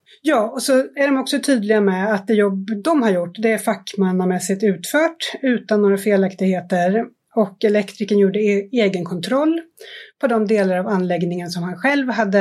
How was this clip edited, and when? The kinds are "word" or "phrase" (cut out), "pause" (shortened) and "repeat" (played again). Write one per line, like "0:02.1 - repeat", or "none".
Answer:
none